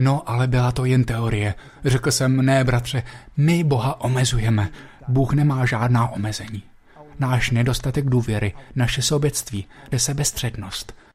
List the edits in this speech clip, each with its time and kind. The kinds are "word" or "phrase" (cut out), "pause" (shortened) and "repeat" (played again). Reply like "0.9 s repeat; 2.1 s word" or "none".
9.9 s word